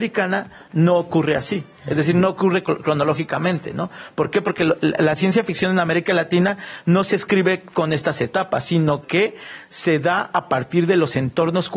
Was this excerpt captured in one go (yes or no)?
yes